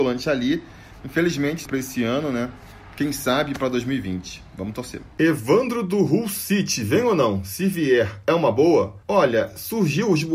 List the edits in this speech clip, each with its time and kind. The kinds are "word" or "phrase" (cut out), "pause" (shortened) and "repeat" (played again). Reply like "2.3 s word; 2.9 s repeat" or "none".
1.7 s phrase; 5.1 s pause; 9.0 s pause